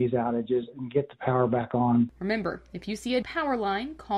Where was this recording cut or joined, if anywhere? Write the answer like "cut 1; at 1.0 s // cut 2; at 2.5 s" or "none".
cut 1; at 3.2 s